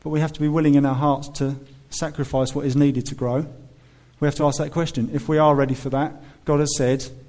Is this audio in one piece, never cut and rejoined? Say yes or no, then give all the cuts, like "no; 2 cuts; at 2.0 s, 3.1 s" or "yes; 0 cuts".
yes; 0 cuts